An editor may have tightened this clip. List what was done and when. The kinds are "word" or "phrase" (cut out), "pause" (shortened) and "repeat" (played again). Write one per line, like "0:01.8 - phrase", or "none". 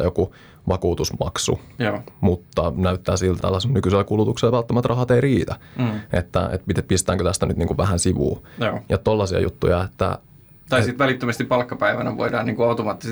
0:03.4 - word